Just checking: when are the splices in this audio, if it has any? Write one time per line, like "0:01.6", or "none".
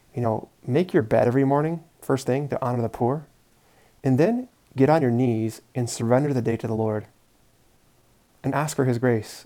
none